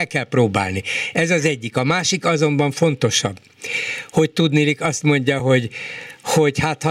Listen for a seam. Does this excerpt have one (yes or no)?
no